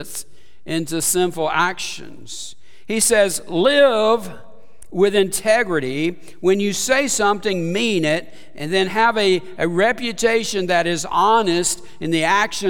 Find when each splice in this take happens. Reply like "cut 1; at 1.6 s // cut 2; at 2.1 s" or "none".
none